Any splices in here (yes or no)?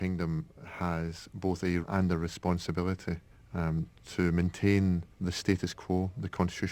yes